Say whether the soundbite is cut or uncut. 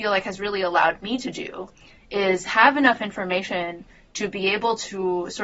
uncut